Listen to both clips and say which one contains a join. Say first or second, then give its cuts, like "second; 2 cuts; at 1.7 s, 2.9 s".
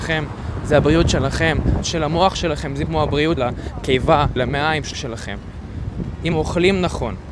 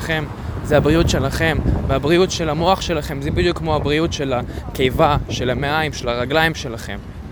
first; 6 cuts; at 1.8 s, 2.9 s, 3.4 s, 4.4 s, 4.9 s, 6.3 s